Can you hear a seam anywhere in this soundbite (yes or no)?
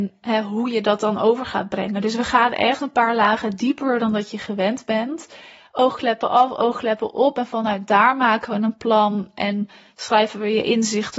no